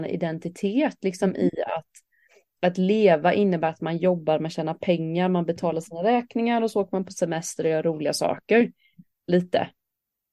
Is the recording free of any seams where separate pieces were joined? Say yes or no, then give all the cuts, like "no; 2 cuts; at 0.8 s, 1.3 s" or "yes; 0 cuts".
yes; 0 cuts